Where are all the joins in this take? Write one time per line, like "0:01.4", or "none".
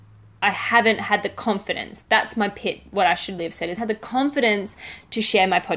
0:03.4
0:03.8